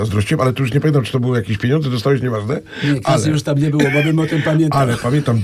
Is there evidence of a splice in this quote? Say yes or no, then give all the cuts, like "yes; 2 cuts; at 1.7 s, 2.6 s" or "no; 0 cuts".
no; 0 cuts